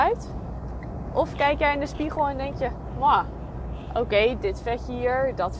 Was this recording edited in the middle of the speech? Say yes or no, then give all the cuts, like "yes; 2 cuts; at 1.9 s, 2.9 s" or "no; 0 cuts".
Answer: no; 0 cuts